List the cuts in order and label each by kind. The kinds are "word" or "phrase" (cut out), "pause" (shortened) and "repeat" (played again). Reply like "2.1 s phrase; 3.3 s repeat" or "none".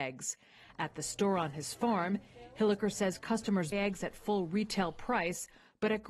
3.7 s word